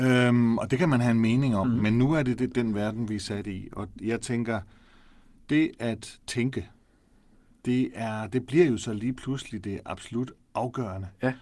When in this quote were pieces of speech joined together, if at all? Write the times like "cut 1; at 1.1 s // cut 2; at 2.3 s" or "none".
none